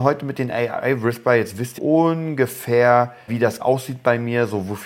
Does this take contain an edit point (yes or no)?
yes